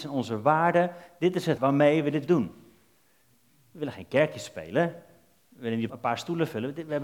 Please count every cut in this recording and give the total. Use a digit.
3